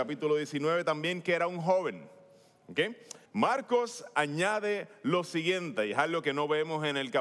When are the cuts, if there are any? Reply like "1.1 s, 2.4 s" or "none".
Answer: 3.3 s